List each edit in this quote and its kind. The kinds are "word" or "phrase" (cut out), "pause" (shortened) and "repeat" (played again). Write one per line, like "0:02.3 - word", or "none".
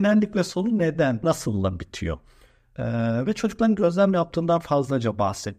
0:01.2 - word